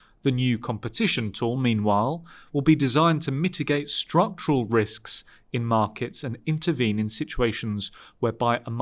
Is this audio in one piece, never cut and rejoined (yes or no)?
yes